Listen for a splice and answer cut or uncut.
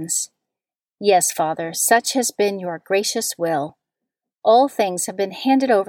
uncut